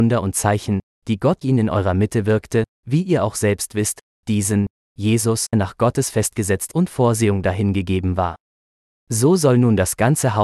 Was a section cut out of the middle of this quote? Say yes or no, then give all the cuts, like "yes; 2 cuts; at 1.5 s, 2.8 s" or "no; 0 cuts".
yes; 4 cuts; at 1.4 s, 5.5 s, 6.7 s, 8.2 s